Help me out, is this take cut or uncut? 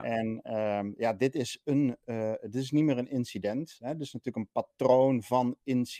uncut